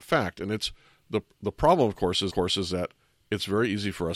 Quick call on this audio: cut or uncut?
cut